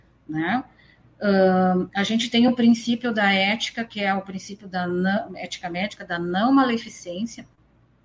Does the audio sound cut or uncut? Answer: uncut